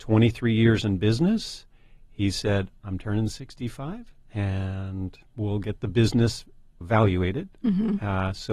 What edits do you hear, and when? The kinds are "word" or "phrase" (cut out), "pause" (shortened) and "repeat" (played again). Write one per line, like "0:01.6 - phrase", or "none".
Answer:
0:05.3 - pause
0:06.8 - word